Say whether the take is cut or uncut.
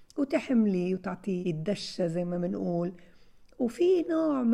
cut